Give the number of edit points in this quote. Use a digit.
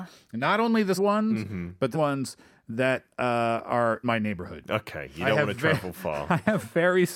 3